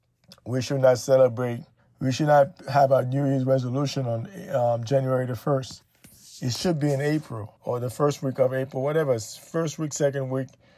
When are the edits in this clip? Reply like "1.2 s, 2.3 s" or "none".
1.8 s, 7.6 s